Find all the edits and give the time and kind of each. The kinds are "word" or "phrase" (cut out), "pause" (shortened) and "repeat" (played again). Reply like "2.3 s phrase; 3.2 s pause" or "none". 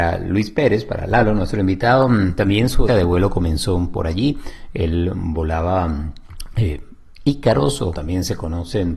2.9 s word; 7.9 s word